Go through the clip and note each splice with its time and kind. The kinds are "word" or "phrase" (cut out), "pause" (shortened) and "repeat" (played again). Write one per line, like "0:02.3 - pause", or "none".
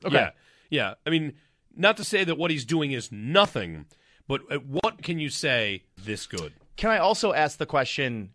0:05.0 - word
0:06.0 - phrase